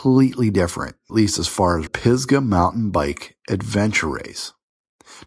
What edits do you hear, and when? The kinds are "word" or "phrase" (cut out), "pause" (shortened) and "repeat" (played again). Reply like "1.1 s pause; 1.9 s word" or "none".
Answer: 1.1 s word; 1.9 s phrase